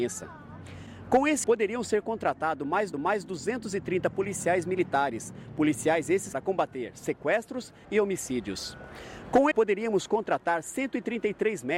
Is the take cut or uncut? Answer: cut